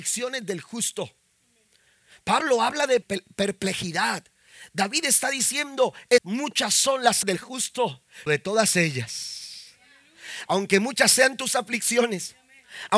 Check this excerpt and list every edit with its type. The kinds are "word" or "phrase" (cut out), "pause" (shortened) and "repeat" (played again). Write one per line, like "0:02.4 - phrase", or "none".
0:03.0 - word
0:06.2 - word
0:07.2 - word
0:08.3 - word